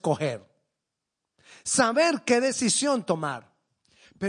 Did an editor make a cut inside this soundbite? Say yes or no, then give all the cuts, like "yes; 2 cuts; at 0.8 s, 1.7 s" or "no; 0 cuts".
no; 0 cuts